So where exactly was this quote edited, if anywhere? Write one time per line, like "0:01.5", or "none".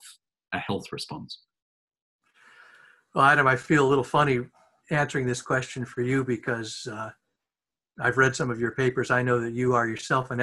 none